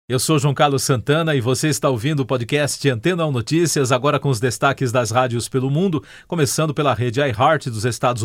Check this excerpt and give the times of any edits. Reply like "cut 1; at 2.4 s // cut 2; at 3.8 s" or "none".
none

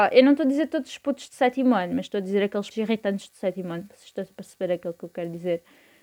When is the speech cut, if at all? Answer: cut 1; at 2.7 s

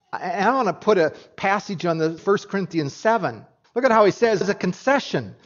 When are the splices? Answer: cut 1; at 2.2 s // cut 2; at 3.6 s // cut 3; at 4.4 s

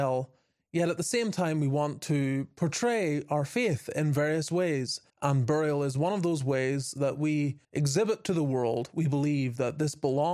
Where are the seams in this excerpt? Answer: cut 1; at 5.1 s // cut 2; at 7.6 s

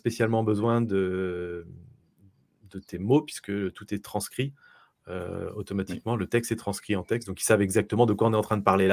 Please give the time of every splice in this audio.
none

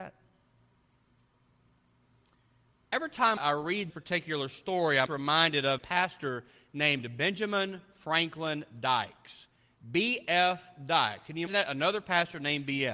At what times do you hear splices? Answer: cut 1; at 3.4 s // cut 2; at 3.9 s // cut 3; at 5.1 s // cut 4; at 5.8 s // cut 5; at 11.5 s

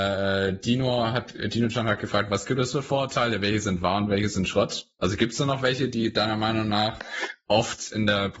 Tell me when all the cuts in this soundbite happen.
none

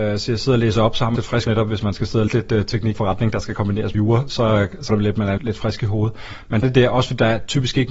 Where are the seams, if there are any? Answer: cut 1; at 1.2 s // cut 2; at 1.5 s // cut 3; at 2.3 s // cut 4; at 2.9 s // cut 5; at 3.9 s // cut 6; at 4.9 s // cut 7; at 5.4 s // cut 8; at 6.6 s

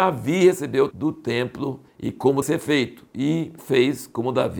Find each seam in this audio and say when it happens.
cut 1; at 0.9 s // cut 2; at 1.9 s // cut 3; at 2.4 s // cut 4; at 3.6 s

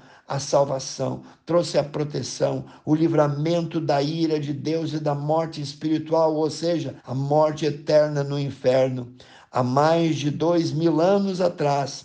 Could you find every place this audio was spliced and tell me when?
cut 1; at 7.0 s

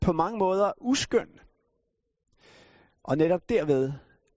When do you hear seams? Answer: none

